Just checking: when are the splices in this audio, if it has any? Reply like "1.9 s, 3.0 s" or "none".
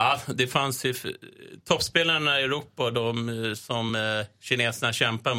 none